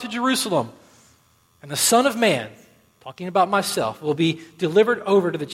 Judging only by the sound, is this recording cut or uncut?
uncut